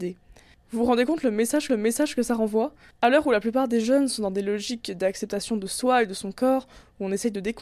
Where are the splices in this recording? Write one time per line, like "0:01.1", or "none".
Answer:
0:01.7
0:02.9